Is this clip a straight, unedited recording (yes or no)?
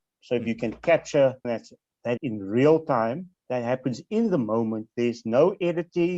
no